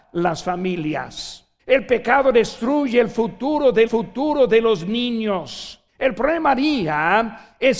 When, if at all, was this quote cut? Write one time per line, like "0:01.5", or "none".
0:01.6
0:03.9
0:05.9